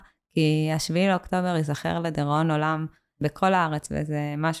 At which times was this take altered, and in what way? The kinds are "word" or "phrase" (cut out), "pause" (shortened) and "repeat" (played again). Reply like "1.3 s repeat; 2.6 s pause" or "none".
none